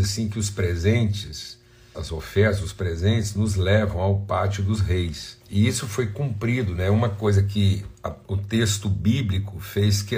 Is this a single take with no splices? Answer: no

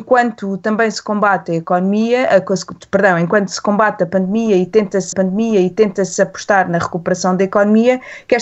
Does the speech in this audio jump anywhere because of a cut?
yes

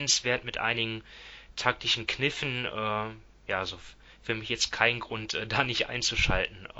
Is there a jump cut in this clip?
no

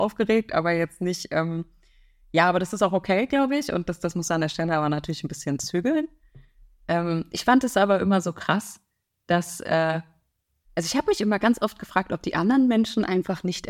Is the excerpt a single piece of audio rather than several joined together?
yes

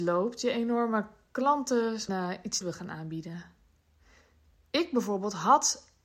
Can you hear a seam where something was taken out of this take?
yes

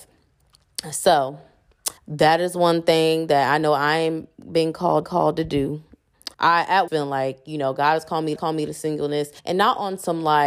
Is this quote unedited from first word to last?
no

